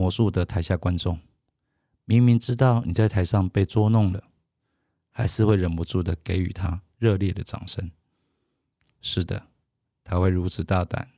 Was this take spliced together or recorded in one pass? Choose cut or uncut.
uncut